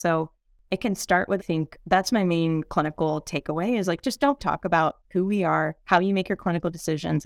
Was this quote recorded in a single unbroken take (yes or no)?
no